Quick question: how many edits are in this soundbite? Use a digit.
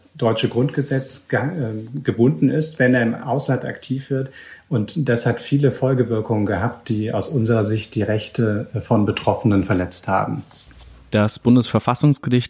0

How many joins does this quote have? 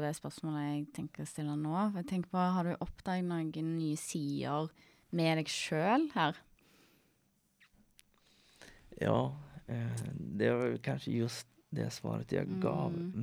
1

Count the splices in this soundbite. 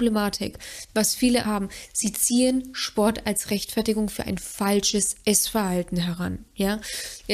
1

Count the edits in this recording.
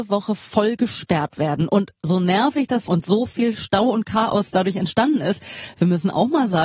1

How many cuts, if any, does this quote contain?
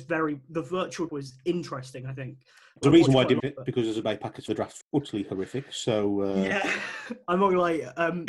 6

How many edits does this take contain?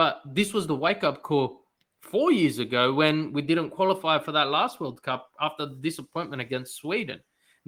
0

